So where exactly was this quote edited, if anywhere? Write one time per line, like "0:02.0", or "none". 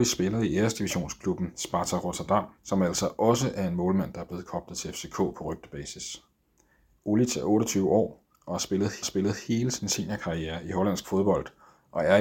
0:02.6
0:09.0

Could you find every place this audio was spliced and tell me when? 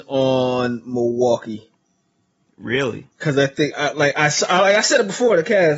0:03.1
0:03.7

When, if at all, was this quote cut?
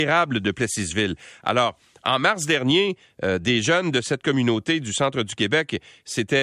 none

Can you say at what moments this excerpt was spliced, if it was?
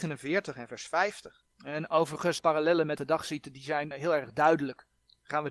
0:01.5
0:02.4
0:03.0
0:03.9

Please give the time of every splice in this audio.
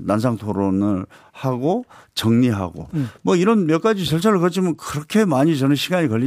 none

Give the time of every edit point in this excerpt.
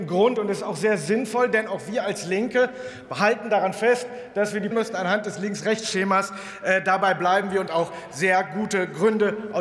0:04.7
0:07.7

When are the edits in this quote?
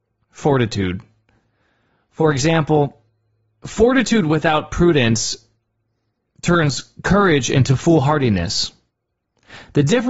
none

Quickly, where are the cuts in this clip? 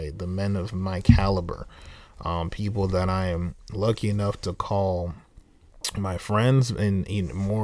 none

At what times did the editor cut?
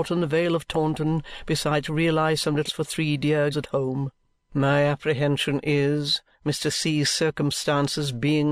0:01.8
0:02.7
0:03.5
0:04.3

